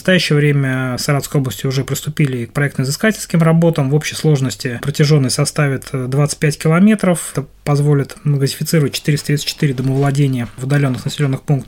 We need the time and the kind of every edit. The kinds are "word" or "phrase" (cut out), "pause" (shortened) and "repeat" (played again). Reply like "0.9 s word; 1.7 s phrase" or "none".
1.0 s phrase; 4.8 s word